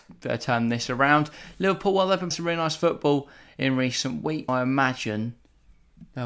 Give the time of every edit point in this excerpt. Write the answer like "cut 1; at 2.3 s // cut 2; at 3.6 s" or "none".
cut 1; at 2.3 s // cut 2; at 4.5 s

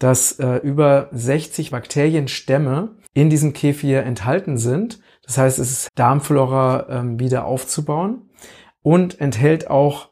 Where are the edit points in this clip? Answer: cut 1; at 1.7 s // cut 2; at 3.1 s // cut 3; at 5.9 s

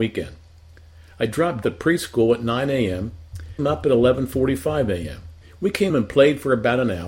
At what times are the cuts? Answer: cut 1; at 1.6 s // cut 2; at 3.6 s // cut 3; at 5.4 s // cut 4; at 5.9 s

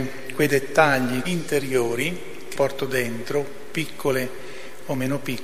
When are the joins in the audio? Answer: cut 1; at 1.2 s // cut 2; at 2.5 s

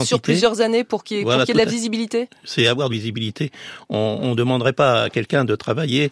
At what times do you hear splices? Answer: cut 1; at 2.9 s

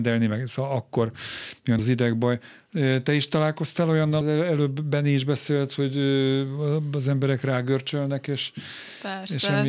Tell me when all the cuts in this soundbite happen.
cut 1; at 1.8 s // cut 2; at 4.2 s

